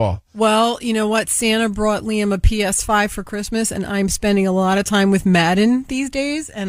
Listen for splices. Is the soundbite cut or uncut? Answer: uncut